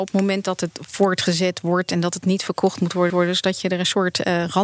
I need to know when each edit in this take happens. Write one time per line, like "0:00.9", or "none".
0:03.1